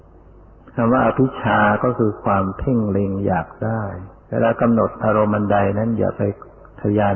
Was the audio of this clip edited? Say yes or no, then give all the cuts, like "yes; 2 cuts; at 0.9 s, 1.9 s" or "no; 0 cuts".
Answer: yes; 1 cut; at 4.2 s